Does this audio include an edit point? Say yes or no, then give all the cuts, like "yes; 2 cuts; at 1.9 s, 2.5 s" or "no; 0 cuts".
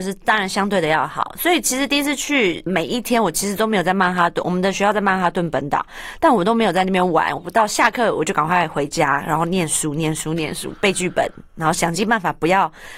yes; 1 cut; at 2.7 s